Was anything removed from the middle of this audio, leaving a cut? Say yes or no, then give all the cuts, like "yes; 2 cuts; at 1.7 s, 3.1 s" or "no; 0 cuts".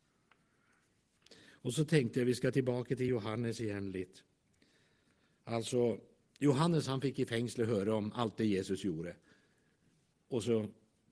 no; 0 cuts